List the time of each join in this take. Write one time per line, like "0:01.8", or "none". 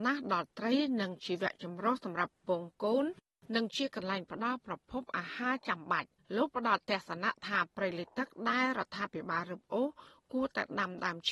0:06.2